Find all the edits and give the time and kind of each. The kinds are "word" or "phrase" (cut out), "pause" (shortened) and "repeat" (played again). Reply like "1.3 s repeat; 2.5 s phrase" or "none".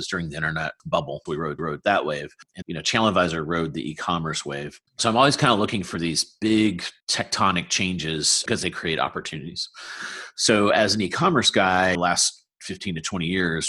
1.3 s word; 1.6 s repeat; 2.6 s word; 4.9 s pause; 7.0 s pause; 11.9 s phrase